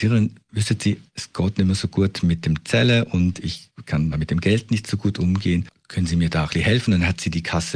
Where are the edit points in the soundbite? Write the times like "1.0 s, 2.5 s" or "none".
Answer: 4.1 s